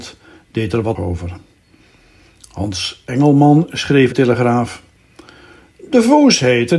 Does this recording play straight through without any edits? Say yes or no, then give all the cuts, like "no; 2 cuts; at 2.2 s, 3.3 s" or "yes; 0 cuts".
no; 2 cuts; at 0.9 s, 4.1 s